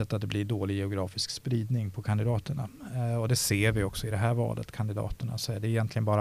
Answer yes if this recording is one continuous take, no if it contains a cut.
yes